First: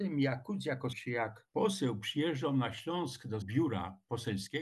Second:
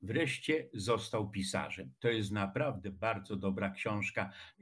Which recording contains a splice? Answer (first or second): first